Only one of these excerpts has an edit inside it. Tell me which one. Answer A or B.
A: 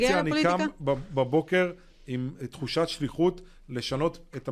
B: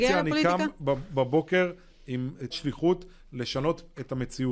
B